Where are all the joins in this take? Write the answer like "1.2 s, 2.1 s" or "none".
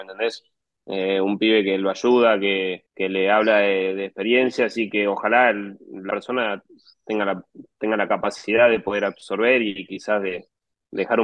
2.9 s, 6.1 s

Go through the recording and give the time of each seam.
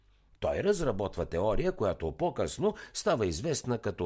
none

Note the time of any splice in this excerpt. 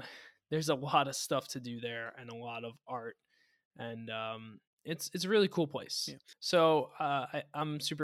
none

